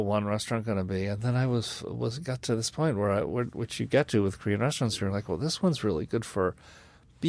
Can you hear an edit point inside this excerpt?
no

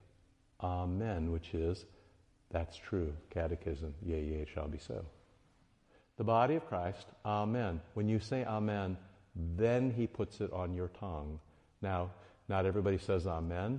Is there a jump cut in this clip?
no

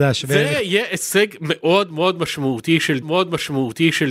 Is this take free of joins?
no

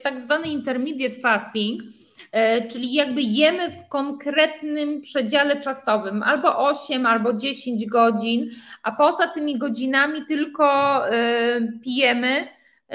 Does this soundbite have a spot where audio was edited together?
no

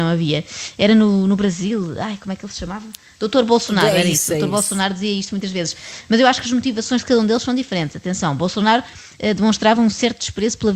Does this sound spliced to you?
no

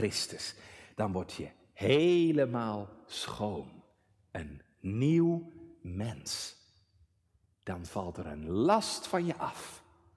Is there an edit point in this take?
no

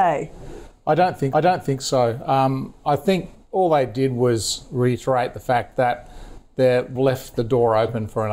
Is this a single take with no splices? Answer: no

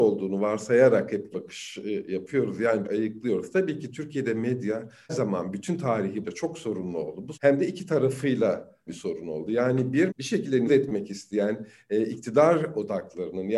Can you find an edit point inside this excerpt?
yes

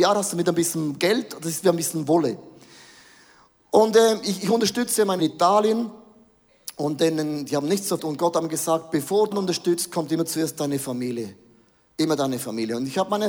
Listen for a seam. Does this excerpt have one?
yes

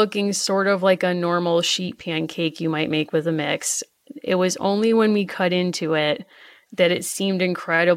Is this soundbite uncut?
yes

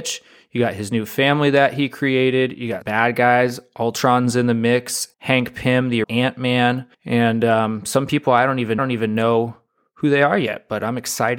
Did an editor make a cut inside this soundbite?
yes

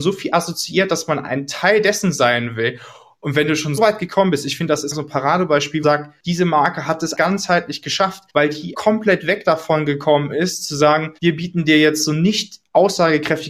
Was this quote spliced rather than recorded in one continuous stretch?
yes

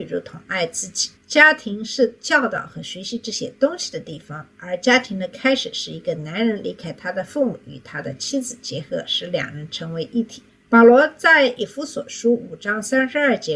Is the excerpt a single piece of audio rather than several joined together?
no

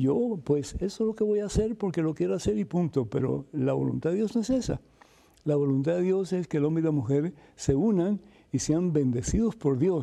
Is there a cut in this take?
no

